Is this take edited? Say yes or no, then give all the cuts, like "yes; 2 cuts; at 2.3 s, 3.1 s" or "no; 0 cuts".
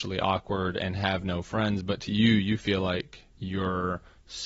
yes; 1 cut; at 3.3 s